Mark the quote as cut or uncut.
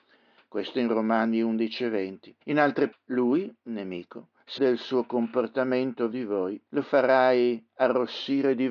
cut